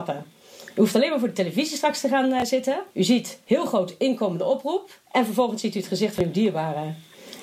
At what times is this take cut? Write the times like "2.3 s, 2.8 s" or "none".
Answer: 2.9 s, 5.0 s